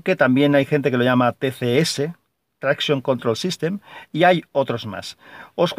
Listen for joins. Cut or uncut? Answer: uncut